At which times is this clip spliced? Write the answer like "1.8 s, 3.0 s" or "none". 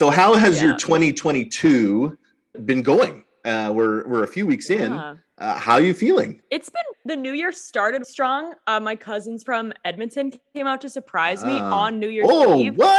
2.5 s, 6.9 s, 8.0 s